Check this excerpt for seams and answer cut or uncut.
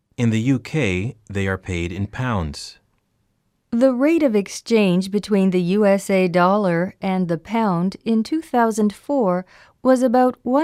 uncut